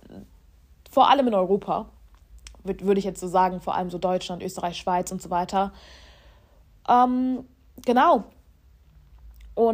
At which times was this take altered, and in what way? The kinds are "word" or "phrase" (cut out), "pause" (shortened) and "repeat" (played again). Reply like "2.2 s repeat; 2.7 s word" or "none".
none